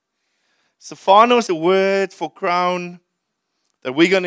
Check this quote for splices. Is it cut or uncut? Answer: cut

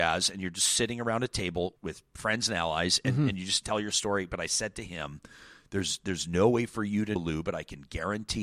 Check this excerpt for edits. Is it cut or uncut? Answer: cut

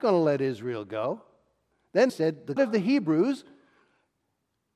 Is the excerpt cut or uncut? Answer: cut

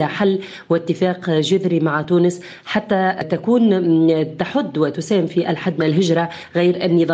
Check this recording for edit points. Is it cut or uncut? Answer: uncut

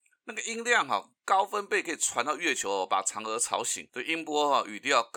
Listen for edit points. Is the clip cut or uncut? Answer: cut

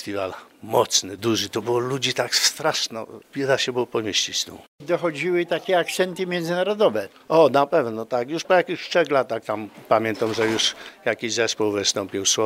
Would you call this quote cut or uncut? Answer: uncut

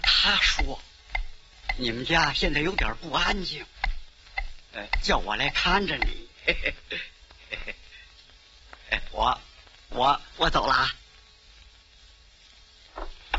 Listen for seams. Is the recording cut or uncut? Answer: cut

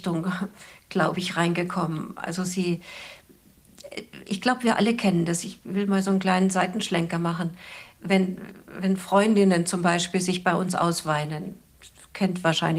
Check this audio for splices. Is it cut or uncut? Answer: uncut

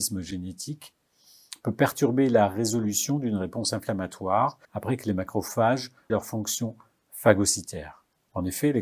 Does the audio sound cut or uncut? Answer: cut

